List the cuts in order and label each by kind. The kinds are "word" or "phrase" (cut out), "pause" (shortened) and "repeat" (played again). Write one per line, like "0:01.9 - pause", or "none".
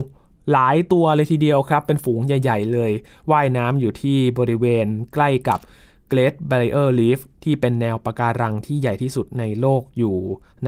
none